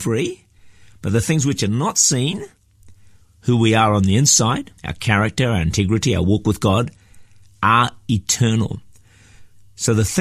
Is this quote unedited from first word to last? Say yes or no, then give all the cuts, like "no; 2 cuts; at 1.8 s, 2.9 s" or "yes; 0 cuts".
no; 1 cut; at 4.8 s